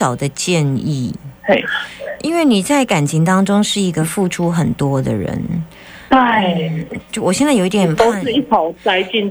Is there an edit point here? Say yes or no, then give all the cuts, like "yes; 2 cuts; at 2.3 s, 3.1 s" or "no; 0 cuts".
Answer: yes; 1 cut; at 1.4 s